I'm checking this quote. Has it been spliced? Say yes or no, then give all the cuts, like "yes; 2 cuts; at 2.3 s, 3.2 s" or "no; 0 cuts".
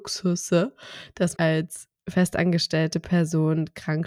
yes; 2 cuts; at 1.4 s, 2.0 s